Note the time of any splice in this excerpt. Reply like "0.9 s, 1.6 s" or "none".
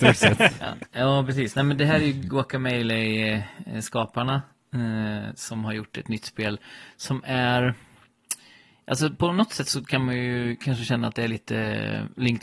none

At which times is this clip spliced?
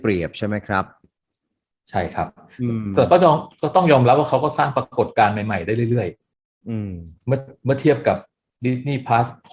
none

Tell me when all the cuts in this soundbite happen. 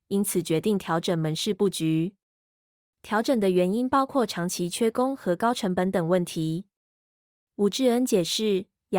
none

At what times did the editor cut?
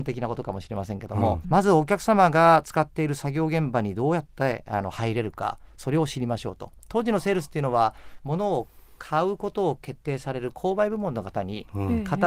1.4 s

